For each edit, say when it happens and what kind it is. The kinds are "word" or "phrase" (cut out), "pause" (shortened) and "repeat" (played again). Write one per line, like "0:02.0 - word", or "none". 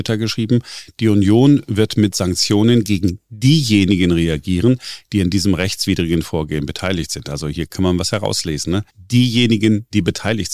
0:08.9 - pause